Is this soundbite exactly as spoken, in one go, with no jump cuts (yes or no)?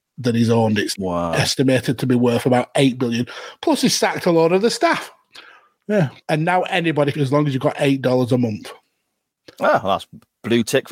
no